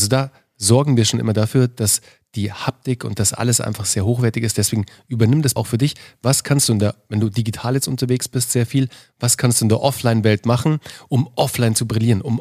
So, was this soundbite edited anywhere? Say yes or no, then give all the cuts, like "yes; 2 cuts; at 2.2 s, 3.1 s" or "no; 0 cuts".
yes; 1 cut; at 5.6 s